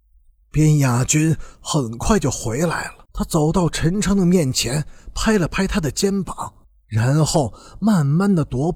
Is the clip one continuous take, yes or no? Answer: no